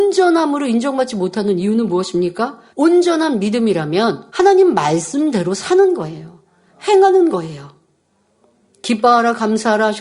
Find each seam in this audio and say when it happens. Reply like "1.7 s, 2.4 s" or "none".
2.7 s, 4.3 s